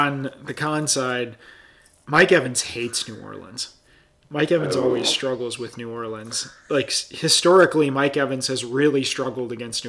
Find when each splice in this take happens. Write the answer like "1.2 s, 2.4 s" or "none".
none